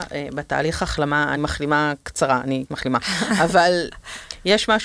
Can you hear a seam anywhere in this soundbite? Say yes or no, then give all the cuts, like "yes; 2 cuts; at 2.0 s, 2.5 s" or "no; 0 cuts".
yes; 2 cuts; at 1.4 s, 2.7 s